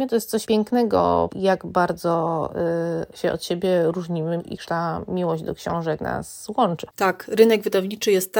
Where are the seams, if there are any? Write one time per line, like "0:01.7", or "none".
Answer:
0:01.3
0:04.4
0:06.9